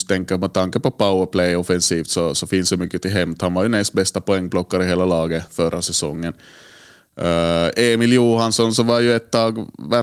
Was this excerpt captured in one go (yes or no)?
yes